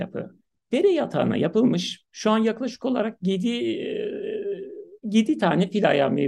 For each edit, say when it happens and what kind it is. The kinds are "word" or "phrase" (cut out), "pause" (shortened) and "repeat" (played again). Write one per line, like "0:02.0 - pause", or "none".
0:05.0 - pause